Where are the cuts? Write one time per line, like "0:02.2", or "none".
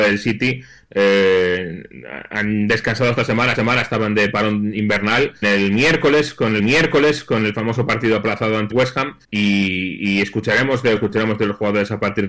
0:03.6
0:05.4
0:06.6
0:08.7
0:09.2
0:11.0